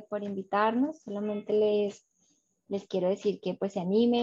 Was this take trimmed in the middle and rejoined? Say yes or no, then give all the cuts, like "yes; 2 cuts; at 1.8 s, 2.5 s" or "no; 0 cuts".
no; 0 cuts